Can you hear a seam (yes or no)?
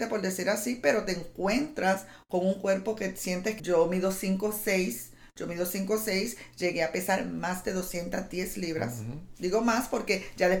yes